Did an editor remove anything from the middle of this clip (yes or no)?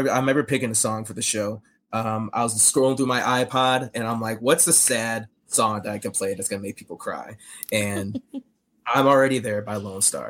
no